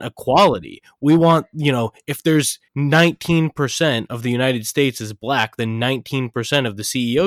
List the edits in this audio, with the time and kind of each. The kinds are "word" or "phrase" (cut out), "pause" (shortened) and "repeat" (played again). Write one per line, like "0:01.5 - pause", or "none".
0:02.7 - pause